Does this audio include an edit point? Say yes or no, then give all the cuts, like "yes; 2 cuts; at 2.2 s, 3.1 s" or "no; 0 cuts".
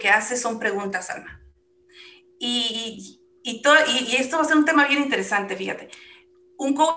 no; 0 cuts